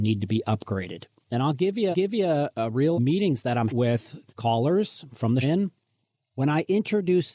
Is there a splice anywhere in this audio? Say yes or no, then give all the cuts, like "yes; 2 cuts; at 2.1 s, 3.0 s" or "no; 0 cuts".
yes; 5 cuts; at 1.9 s, 2.9 s, 3.7 s, 4.3 s, 5.4 s